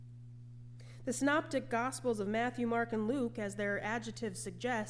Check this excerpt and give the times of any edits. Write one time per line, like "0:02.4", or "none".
none

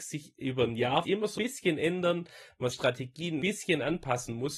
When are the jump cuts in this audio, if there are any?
0:01.0
0:01.4
0:02.7
0:03.4

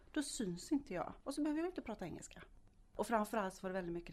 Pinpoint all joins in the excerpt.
none

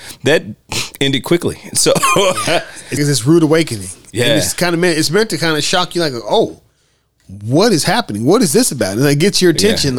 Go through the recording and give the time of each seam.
0:03.0

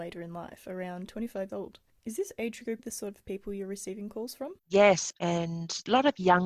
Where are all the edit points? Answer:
0:01.5
0:02.8
0:04.6

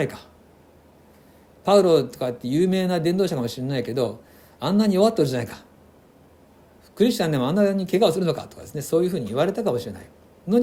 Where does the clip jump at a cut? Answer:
none

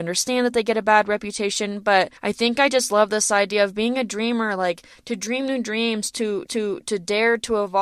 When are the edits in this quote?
0:02.2
0:06.5

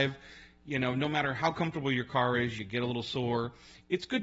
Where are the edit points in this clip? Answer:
none

